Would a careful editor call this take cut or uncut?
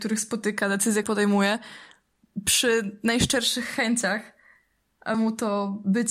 cut